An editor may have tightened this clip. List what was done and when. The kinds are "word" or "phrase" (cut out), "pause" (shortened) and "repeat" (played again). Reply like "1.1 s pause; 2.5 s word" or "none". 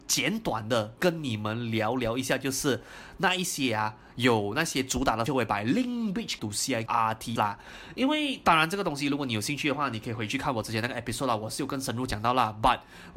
5.3 s word; 6.4 s word; 6.9 s phrase; 7.4 s word